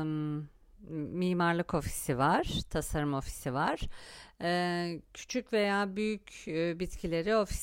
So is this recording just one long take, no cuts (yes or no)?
yes